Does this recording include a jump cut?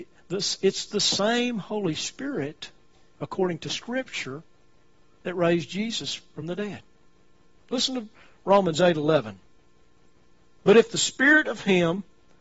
no; 0 cuts

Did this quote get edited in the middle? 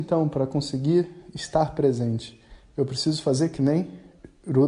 no; 0 cuts

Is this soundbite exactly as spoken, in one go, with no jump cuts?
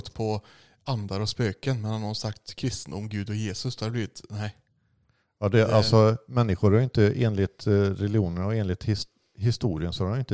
yes; 0 cuts

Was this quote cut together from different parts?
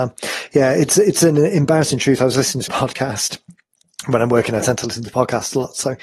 yes; 1 cut; at 2.7 s

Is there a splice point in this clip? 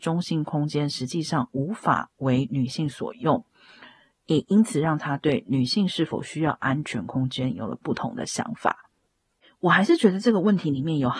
no; 0 cuts

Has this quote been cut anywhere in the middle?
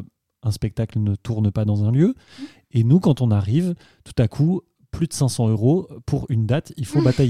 no; 0 cuts

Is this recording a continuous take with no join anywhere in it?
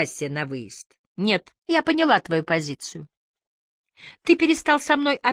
no; 1 cut; at 1.6 s

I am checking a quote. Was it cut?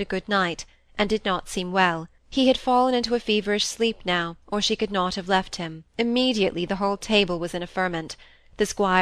yes; 3 cuts; at 2.2 s, 4.4 s, 5.9 s

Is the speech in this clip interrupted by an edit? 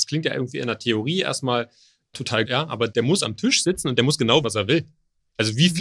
yes; 2 cuts; at 2.4 s, 4.4 s

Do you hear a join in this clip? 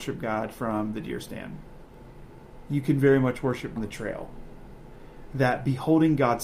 yes; 1 cut; at 3.8 s

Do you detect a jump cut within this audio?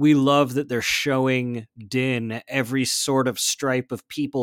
no; 0 cuts

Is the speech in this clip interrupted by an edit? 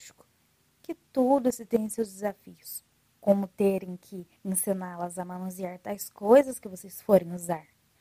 yes; 2 cuts; at 3.1 s, 4.4 s

